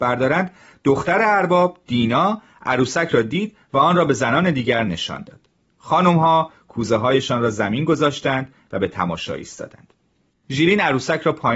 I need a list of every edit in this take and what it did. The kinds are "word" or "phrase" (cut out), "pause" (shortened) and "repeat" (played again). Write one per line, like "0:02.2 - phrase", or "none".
none